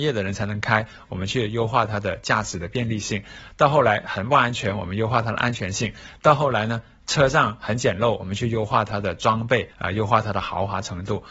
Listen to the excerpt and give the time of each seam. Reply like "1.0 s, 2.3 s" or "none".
9.7 s